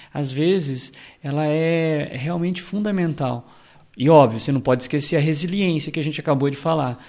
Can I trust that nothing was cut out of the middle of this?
yes; 0 cuts

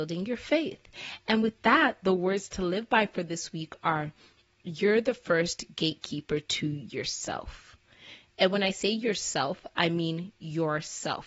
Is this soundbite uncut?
yes; 0 cuts

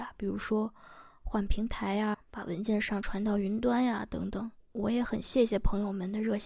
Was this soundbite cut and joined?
yes; 2 cuts; at 2.1 s, 4.6 s

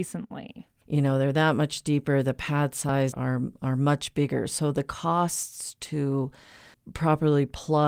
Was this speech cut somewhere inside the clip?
yes; 2 cuts; at 3.1 s, 6.7 s

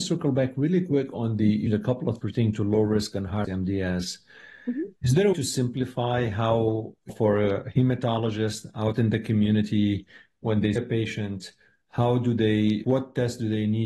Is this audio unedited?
no; 7 cuts; at 1.7 s, 2.2 s, 3.4 s, 5.3 s, 7.1 s, 10.8 s, 12.8 s

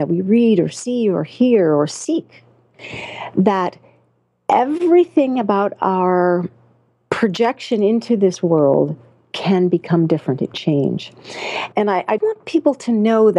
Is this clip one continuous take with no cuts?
no; 3 cuts; at 10.5 s, 11.7 s, 12.2 s

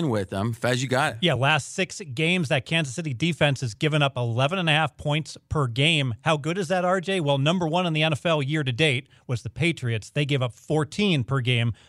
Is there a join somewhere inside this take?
no; 0 cuts

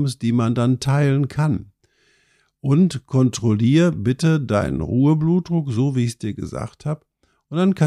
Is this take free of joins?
yes; 0 cuts

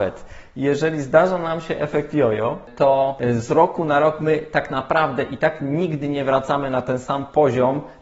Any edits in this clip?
no; 0 cuts

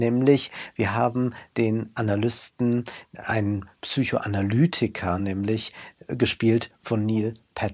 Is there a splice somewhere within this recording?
no; 0 cuts

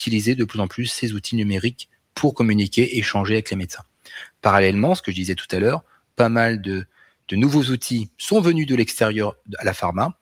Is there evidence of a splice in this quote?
no; 0 cuts

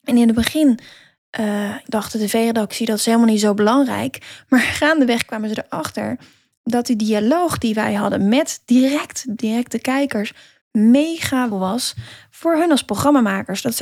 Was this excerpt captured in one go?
no; 3 cuts; at 1.8 s, 9.4 s, 11.5 s

